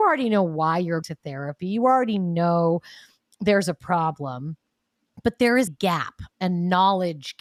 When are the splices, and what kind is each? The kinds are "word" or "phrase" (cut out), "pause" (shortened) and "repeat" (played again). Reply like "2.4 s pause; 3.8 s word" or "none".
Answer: 1.0 s word; 5.7 s word

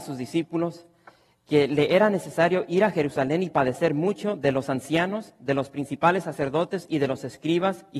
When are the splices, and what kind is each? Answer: none

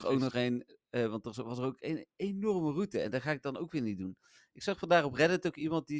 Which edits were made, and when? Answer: none

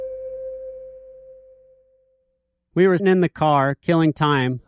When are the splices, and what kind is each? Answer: 3.0 s word

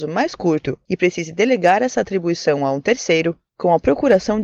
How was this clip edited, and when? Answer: none

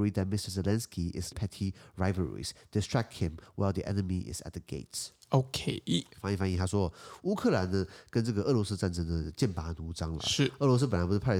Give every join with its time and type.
1.3 s word

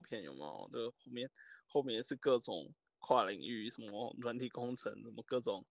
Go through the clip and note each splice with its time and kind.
none

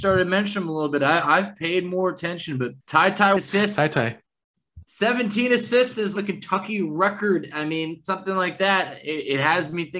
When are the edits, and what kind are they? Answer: 2.8 s pause; 3.4 s phrase; 6.2 s phrase

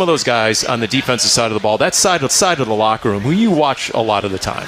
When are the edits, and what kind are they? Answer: 2.3 s repeat

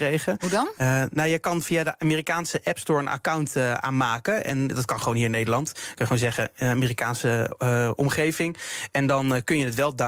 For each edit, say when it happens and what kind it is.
none

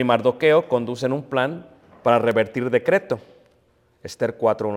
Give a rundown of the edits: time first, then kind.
none

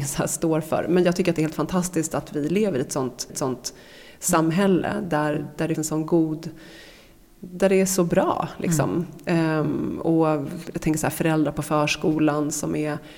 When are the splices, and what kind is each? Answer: 3.3 s repeat; 5.8 s word

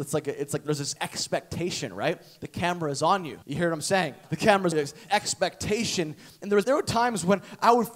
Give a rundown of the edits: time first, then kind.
3.4 s pause; 4.2 s pause; 4.7 s word; 5.1 s word; 6.6 s word

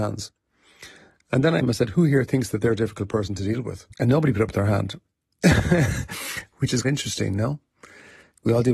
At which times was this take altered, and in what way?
1.6 s word; 3.9 s pause; 6.8 s word

